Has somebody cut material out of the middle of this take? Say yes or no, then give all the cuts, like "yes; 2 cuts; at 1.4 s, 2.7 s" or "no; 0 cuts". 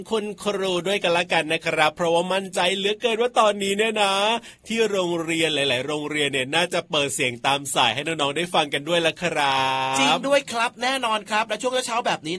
no; 0 cuts